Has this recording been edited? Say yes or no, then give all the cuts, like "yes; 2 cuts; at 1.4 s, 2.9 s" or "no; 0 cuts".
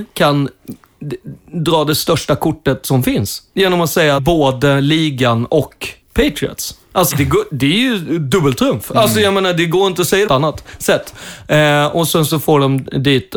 yes; 4 cuts; at 4.2 s, 6.0 s, 7.1 s, 10.3 s